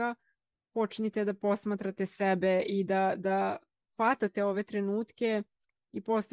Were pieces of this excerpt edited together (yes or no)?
no